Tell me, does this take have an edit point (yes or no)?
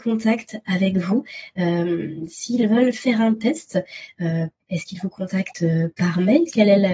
no